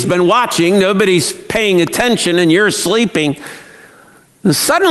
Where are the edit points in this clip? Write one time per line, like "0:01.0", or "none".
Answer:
none